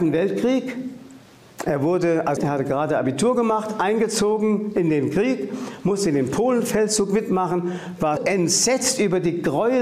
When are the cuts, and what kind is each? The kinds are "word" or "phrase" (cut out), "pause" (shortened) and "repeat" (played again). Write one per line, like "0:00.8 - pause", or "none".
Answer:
0:02.4 - word
0:08.2 - word